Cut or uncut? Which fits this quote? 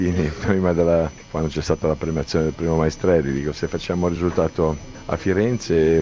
uncut